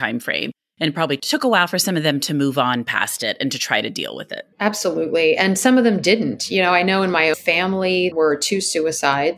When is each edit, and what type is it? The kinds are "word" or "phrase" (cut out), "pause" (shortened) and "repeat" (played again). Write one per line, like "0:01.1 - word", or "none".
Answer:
0:04.5 - pause
0:07.3 - word
0:08.1 - word

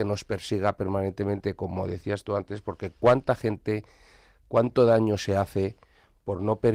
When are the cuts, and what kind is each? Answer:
none

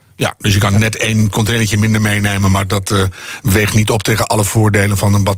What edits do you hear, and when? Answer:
none

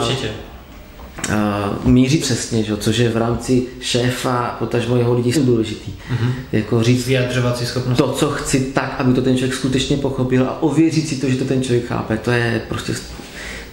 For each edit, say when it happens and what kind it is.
0:02.2 - word
0:03.1 - word
0:05.3 - word

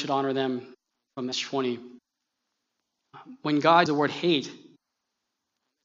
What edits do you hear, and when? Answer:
0:01.3 - word
0:03.9 - word

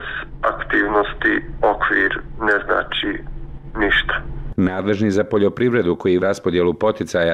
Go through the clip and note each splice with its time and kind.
0:06.2 - word

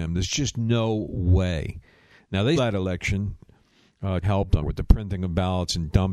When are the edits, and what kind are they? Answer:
0:02.6 - word
0:04.2 - word
0:04.6 - word

